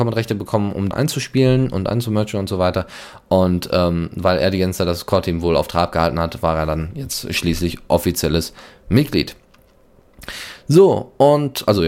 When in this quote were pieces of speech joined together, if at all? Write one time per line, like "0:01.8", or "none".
0:00.9